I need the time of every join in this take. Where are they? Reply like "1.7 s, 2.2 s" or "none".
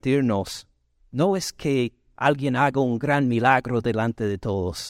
none